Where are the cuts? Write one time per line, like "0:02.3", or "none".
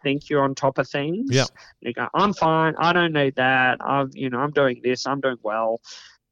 none